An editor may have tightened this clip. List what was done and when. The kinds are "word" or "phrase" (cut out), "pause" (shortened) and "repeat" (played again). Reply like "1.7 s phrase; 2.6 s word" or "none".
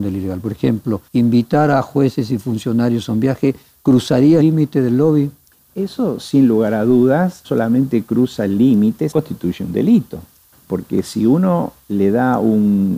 1.1 s pause; 4.4 s word; 5.5 s pause; 7.4 s word; 9.1 s word; 10.5 s pause